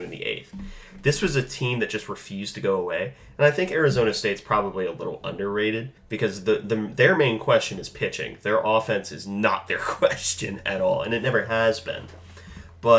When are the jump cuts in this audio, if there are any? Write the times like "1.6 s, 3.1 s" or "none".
6.0 s